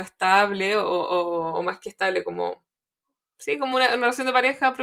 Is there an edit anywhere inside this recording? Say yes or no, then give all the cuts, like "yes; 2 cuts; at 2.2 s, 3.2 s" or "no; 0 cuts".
no; 0 cuts